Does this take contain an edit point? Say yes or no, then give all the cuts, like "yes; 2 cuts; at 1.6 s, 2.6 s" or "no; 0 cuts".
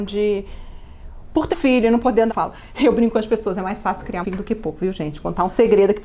yes; 3 cuts; at 1.5 s, 2.3 s, 4.2 s